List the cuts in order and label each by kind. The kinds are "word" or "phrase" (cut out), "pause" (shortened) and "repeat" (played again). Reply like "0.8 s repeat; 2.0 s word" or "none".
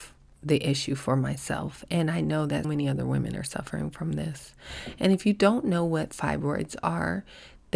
2.6 s word

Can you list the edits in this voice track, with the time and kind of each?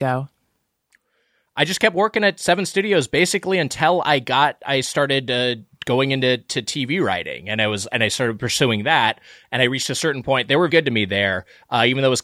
10.7 s word

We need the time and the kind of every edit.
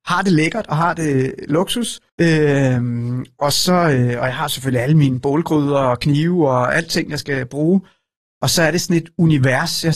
2.1 s pause

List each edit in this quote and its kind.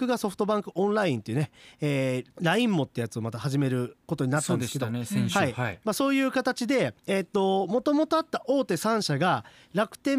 2.3 s pause; 4.0 s pause; 7.0 s pause

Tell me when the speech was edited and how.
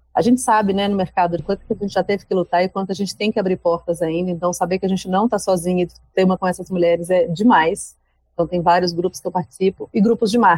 1.4 s phrase; 6.4 s word

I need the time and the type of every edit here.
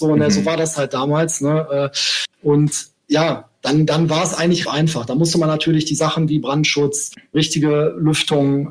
4.6 s word; 7.3 s word

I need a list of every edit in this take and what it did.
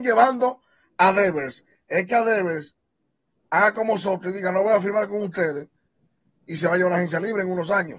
none

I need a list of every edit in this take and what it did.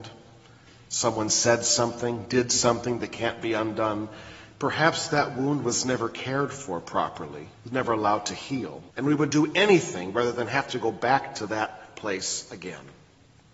7.5 s pause; 8.9 s pause

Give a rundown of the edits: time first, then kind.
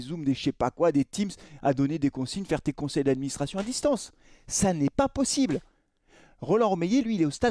none

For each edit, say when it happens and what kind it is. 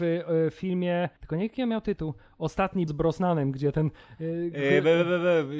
1.2 s pause; 2.9 s word

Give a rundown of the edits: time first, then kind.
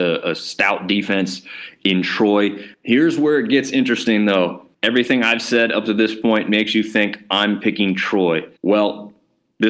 4.7 s pause; 8.6 s pause

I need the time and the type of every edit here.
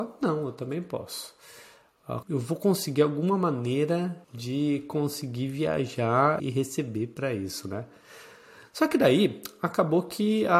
2.2 s word; 4.2 s pause; 6.4 s word

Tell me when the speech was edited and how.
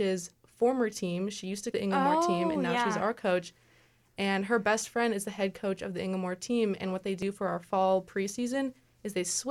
1.7 s word

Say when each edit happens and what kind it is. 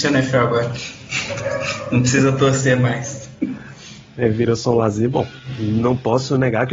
none

